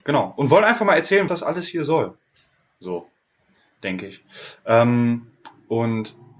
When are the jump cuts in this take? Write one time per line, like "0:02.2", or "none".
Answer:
0:01.3